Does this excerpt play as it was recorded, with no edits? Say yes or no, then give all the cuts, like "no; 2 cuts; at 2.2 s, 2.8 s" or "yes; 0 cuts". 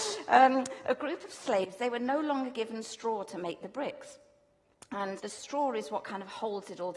no; 1 cut; at 5.2 s